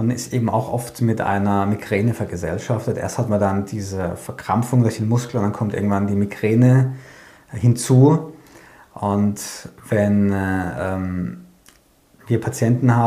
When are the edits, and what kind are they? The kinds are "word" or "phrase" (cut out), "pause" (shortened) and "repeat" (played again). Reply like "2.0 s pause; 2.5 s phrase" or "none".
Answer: none